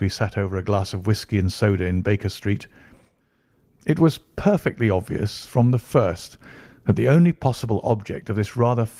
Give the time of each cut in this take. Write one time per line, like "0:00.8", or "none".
none